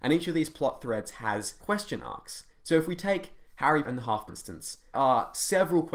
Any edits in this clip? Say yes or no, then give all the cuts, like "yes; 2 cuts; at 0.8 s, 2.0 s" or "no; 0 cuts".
yes; 5 cuts; at 1.6 s, 2.5 s, 3.8 s, 4.3 s, 4.9 s